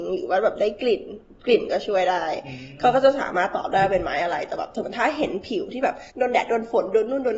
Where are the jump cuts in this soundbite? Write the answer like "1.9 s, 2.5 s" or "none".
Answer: 6.1 s

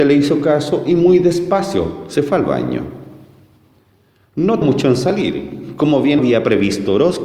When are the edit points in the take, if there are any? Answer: 4.6 s, 6.2 s

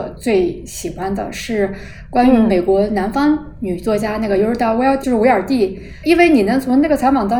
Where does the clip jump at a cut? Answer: 5.0 s

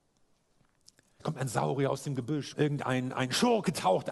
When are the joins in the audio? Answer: 2.5 s

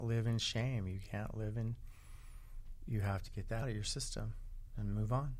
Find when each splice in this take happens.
3.3 s, 3.6 s

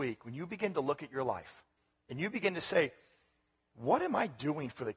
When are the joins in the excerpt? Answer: 1.8 s

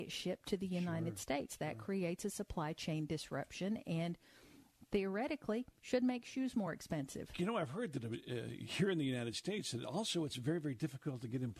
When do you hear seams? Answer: none

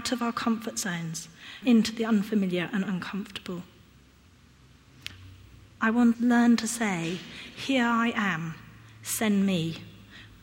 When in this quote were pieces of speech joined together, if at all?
1.6 s, 6.1 s

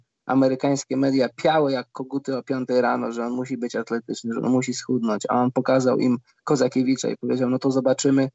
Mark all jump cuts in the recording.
none

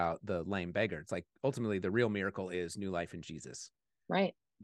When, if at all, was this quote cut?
none

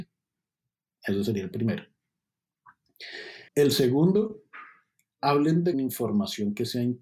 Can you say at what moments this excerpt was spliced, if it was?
3.5 s, 5.7 s

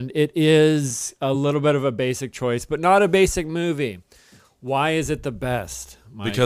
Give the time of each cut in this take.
none

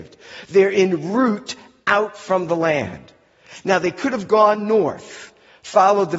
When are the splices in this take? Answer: none

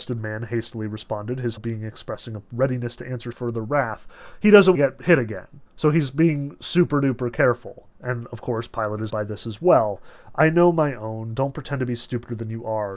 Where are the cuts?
1.6 s, 3.3 s, 4.7 s, 5.7 s, 7.9 s, 9.1 s

